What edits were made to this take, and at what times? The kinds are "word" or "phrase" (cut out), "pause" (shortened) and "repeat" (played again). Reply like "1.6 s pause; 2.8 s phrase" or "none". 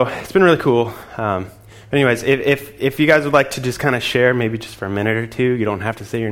none